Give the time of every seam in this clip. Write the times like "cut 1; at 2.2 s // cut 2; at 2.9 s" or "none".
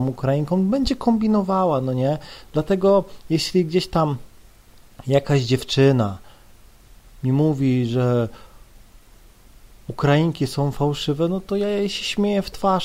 none